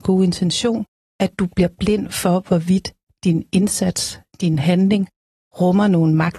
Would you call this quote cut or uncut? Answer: uncut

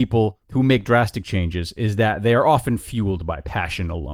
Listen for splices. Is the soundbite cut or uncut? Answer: uncut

